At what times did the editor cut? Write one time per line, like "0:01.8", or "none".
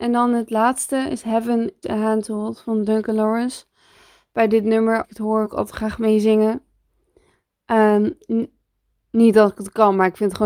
0:01.8
0:05.0
0:05.4